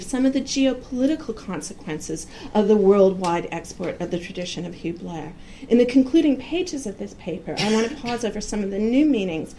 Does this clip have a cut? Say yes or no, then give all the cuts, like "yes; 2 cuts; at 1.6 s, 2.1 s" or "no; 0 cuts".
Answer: no; 0 cuts